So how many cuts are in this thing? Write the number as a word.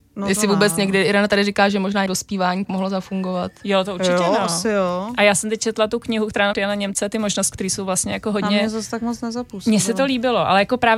four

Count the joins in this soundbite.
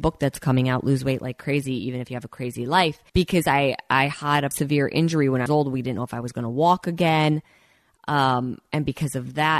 three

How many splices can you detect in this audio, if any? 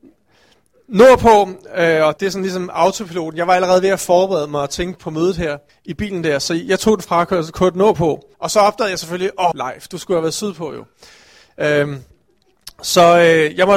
five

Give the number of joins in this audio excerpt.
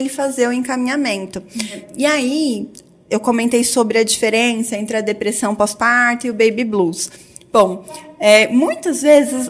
zero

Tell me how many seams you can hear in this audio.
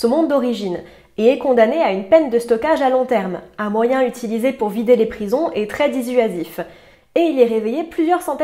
zero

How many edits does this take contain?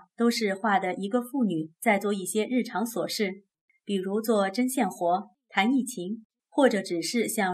zero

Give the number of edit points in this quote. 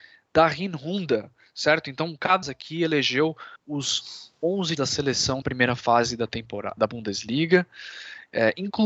five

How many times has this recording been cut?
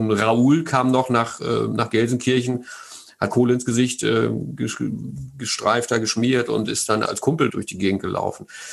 three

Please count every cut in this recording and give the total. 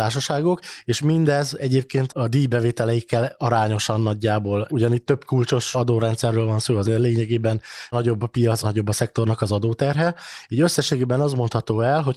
six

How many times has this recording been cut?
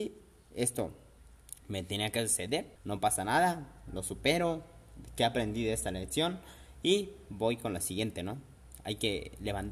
one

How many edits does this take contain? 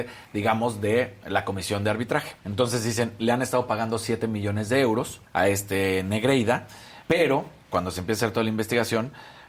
three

